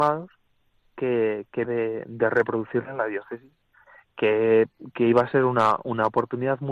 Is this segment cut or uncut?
cut